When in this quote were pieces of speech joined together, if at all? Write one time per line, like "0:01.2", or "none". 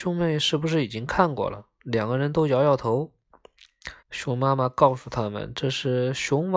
0:04.0

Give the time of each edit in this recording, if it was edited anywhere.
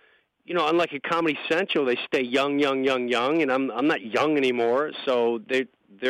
none

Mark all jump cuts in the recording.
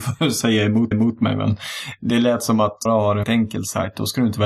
0:00.9
0:02.9
0:03.2

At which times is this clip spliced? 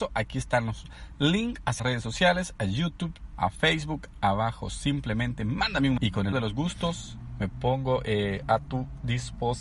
0:01.8
0:03.3
0:04.1
0:06.0
0:06.3

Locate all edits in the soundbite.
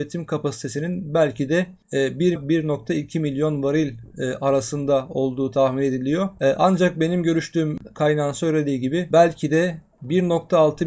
0:02.4

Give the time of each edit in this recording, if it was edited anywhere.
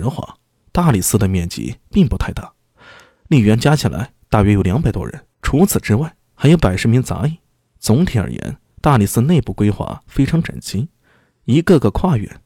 0:05.3

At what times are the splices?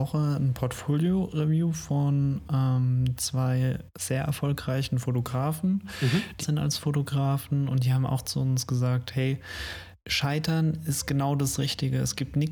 0:06.4
0:10.0

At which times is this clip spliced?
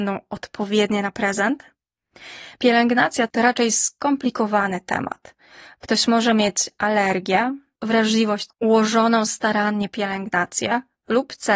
0:03.3
0:07.8
0:08.5

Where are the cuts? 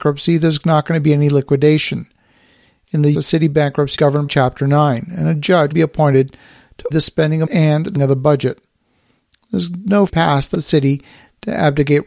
0:03.1
0:04.0
0:04.3
0:05.7
0:06.9
0:07.5
0:08.0
0:10.1
0:10.5

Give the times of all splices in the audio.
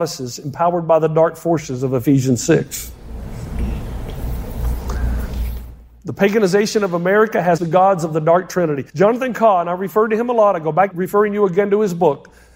0:07.6
0:08.9
0:10.9

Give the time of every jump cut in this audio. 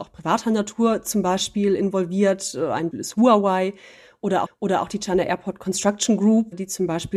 0:02.9
0:04.5

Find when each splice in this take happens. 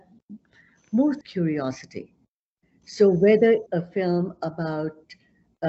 0:01.2
0:03.7

